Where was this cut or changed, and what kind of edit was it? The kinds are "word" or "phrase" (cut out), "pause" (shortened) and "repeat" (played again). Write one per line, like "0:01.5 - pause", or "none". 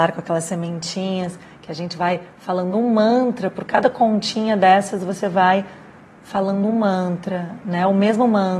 none